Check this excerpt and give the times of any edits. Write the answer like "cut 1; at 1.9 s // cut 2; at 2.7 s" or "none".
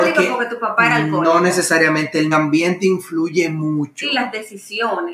cut 1; at 2.3 s

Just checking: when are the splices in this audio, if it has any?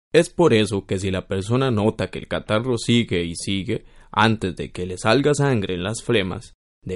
none

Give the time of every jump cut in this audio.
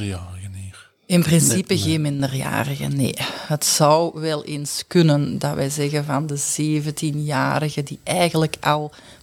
none

